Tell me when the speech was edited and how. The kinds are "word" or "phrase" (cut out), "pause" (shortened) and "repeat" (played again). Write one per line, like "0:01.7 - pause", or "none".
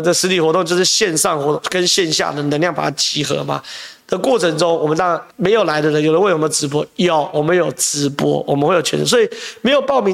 0:05.3 - pause